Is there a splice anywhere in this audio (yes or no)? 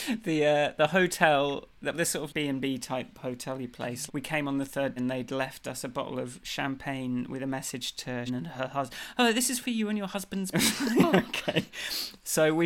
yes